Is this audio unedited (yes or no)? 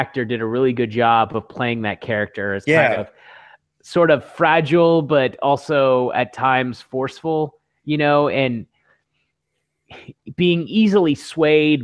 yes